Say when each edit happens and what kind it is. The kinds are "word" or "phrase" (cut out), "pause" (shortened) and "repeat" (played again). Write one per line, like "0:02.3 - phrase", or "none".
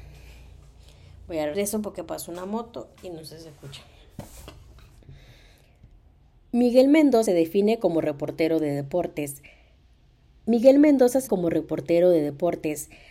0:01.5 - word
0:07.3 - word
0:11.3 - word

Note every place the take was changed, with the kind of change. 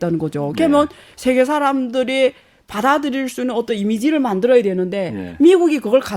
none

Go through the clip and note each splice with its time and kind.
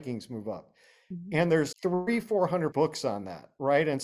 0:01.7 - word
0:02.7 - word

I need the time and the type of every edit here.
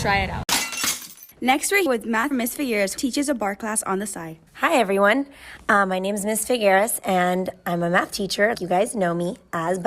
0:01.3 - pause
0:01.9 - word
0:02.3 - word
0:03.0 - word
0:04.5 - pause
0:08.5 - word

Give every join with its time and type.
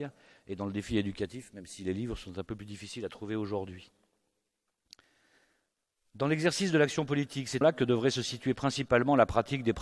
0:07.6 - word

